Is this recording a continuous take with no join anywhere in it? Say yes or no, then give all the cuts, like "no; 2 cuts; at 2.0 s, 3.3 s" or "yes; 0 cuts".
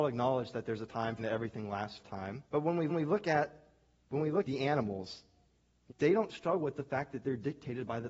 no; 6 cuts; at 1.2 s, 2.0 s, 2.5 s, 2.9 s, 4.4 s, 5.9 s